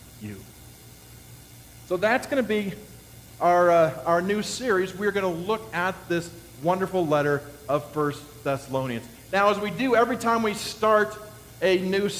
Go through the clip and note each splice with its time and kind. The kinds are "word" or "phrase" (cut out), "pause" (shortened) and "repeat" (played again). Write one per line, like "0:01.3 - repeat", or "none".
none